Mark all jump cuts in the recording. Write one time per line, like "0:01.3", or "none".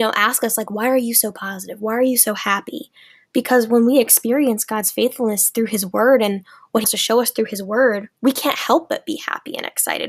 0:06.8
0:08.2